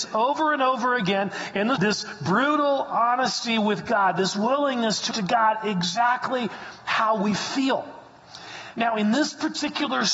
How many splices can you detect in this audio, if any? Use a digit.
2